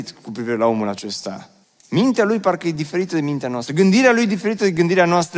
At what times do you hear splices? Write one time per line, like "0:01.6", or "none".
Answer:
0:01.6

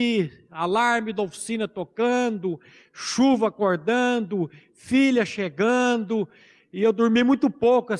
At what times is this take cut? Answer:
none

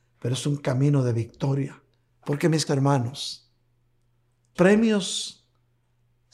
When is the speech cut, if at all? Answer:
0:02.1
0:02.7
0:04.5

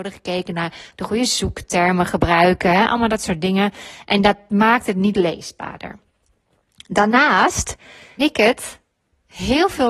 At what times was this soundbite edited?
0:08.2

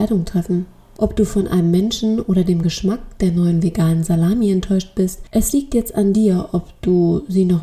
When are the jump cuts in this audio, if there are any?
none

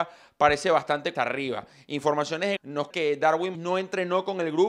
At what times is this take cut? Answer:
0:01.1
0:02.6
0:02.9
0:03.5

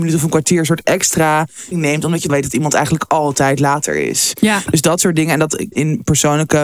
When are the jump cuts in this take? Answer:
0:01.7
0:02.3
0:05.7

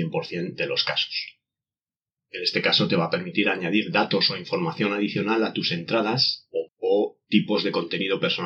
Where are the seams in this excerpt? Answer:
0:06.7

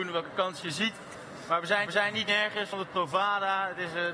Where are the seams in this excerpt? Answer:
0:01.9
0:02.7

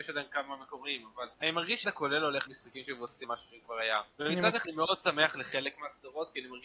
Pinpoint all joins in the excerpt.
0:01.3
0:01.8
0:02.5
0:03.2
0:04.1
0:04.6

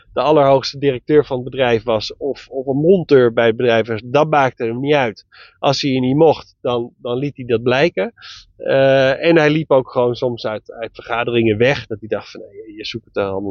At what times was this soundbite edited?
none

